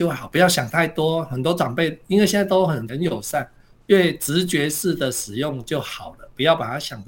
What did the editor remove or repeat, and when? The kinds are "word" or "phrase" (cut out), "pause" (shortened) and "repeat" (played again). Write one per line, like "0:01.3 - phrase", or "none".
0:02.9 - word